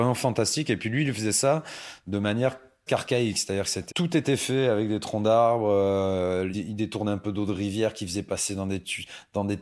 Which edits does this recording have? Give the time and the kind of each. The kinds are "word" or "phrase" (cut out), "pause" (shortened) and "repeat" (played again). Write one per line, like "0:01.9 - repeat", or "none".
0:02.9 - word
0:03.9 - word
0:06.5 - word

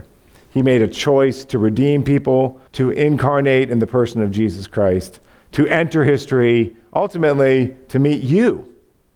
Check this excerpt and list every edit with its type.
0:02.7 - pause

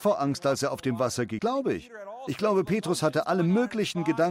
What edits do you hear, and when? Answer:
0:01.4 - word

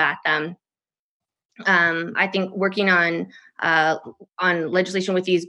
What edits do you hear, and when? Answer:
none

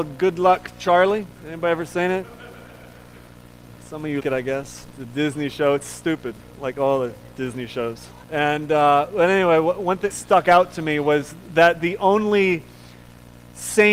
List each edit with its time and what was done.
0:01.4 - pause
0:04.2 - word
0:08.2 - pause
0:10.1 - phrase

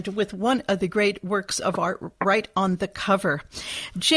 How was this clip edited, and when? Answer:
none

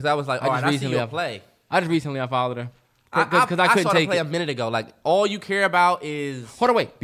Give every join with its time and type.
none

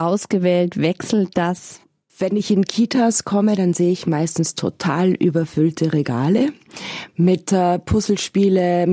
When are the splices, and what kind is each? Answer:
none

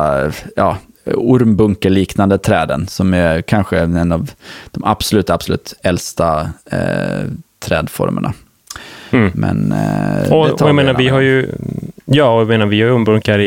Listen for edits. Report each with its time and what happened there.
none

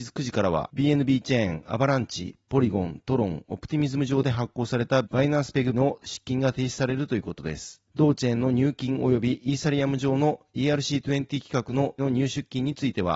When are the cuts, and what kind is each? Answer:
0:05.0 - word
0:05.7 - word
0:12.0 - word

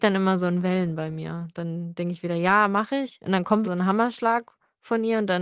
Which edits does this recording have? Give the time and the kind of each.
0:03.6 - word

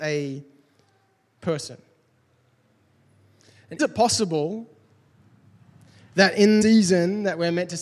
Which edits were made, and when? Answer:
0:03.8 - word
0:06.6 - word

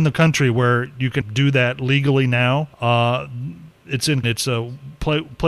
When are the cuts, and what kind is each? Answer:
0:01.2 - word
0:02.7 - pause
0:04.2 - phrase

